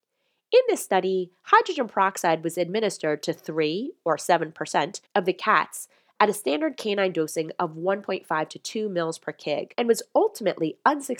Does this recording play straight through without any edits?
no; 2 cuts; at 5.0 s, 9.7 s

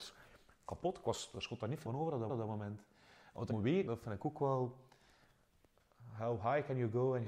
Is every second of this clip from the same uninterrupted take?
no; 5 cuts; at 1.3 s, 1.8 s, 2.3 s, 3.5 s, 3.9 s

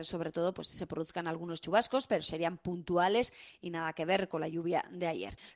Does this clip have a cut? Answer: no; 0 cuts

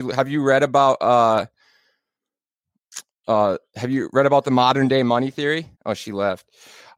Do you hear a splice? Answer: yes; 1 cut; at 5.7 s

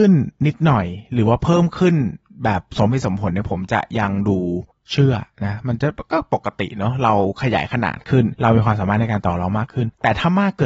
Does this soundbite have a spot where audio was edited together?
yes; 1 cut; at 4.7 s

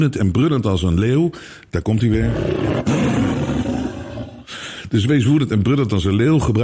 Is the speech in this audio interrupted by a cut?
no; 0 cuts

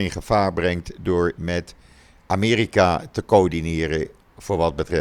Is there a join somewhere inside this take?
no; 0 cuts

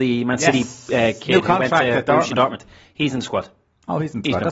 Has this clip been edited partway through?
no; 0 cuts

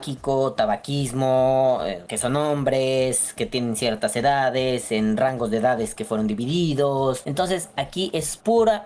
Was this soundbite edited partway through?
no; 0 cuts

